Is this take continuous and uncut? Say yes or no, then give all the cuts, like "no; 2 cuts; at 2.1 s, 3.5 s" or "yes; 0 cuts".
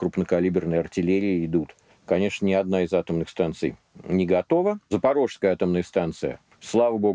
no; 1 cut; at 1.9 s